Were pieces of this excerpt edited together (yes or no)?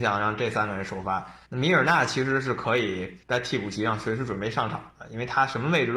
yes